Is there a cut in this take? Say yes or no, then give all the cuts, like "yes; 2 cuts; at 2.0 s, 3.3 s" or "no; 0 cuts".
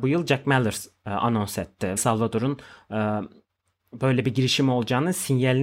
yes; 1 cut; at 2.0 s